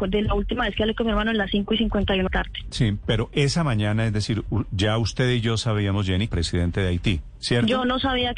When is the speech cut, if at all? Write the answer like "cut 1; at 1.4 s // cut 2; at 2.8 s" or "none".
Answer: cut 1; at 2.3 s // cut 2; at 6.3 s